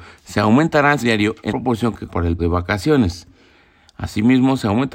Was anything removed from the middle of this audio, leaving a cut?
yes; 4 cuts; at 1.0 s, 1.5 s, 2.1 s, 2.4 s

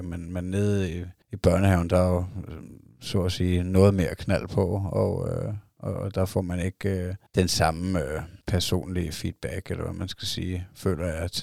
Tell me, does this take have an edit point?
yes; 3 cuts; at 1.2 s, 7.3 s, 8.4 s

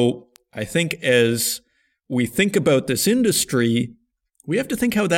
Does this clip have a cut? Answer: no; 0 cuts

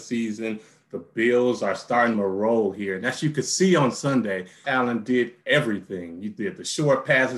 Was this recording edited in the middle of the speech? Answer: yes; 2 cuts; at 2.1 s, 4.6 s

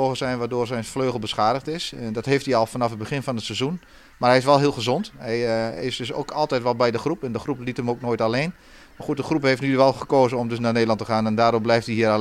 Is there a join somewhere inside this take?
no; 0 cuts

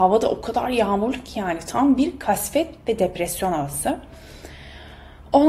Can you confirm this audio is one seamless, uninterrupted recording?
yes; 0 cuts

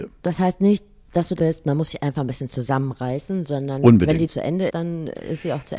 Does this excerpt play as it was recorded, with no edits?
no; 3 cuts; at 1.4 s, 4.3 s, 4.7 s

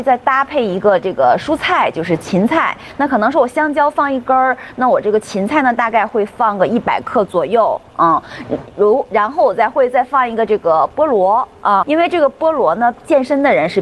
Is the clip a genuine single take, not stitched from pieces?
no; 1 cut; at 11.8 s

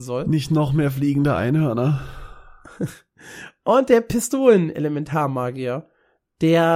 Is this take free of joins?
yes; 0 cuts

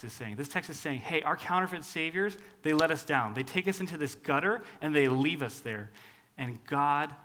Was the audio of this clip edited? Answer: no; 0 cuts

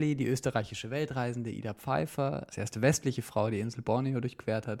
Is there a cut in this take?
yes; 1 cut; at 2.5 s

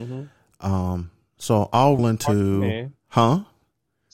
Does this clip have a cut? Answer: yes; 1 cut; at 2.0 s

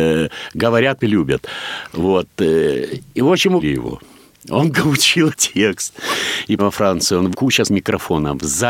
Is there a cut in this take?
yes; 7 cuts; at 1.0 s, 3.6 s, 4.7 s, 5.3 s, 6.6 s, 7.3 s, 7.6 s

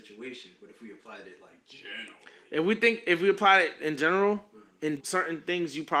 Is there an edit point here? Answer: yes; 1 cut; at 5.0 s

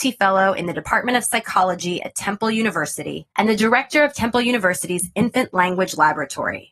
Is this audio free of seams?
no; 1 cut; at 3.3 s

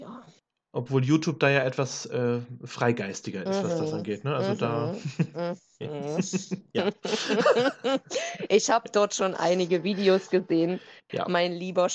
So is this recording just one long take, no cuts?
yes; 0 cuts

